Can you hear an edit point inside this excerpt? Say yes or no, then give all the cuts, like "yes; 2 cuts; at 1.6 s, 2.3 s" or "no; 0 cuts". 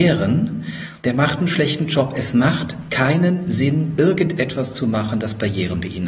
no; 0 cuts